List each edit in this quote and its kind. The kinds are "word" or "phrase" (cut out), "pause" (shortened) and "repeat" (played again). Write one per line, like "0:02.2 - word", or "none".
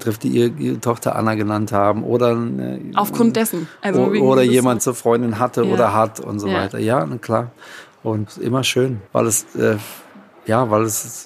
0:04.8 - phrase
0:08.3 - word
0:09.1 - pause

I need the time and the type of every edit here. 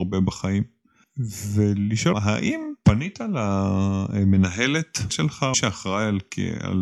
0:02.1 - word
0:05.1 - phrase
0:05.5 - word

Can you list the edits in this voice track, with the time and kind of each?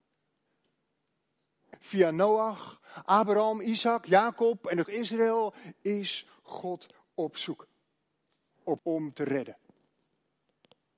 0:01.7 - word
0:04.8 - word
0:08.8 - word

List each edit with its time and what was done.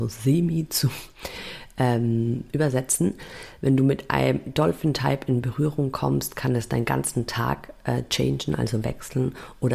none

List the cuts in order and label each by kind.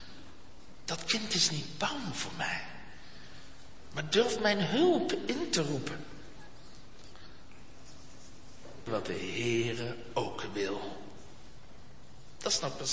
0:08.9 - phrase

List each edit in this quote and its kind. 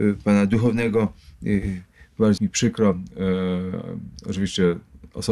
0:02.4 - word

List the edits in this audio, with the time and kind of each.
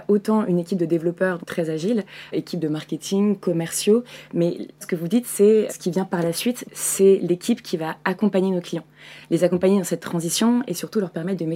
0:01.4 - word
0:02.3 - word
0:04.8 - word
0:05.7 - word
0:06.6 - word

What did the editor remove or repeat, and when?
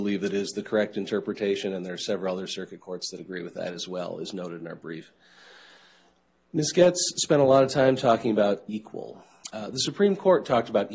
none

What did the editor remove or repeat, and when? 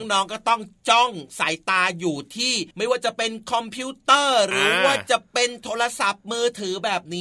0:02.7 - pause

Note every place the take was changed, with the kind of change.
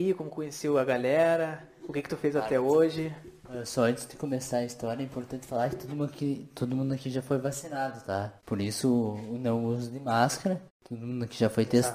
0:08.4 - pause
0:10.7 - pause

